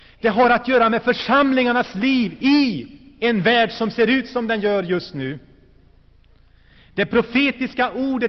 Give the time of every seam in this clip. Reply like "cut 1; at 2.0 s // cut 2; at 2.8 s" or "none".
none